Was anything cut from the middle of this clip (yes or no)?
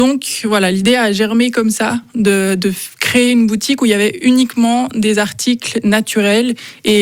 no